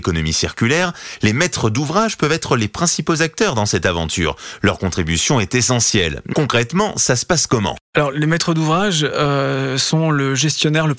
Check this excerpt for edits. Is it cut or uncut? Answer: cut